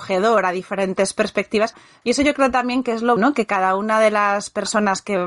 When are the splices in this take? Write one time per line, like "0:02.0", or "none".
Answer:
0:03.2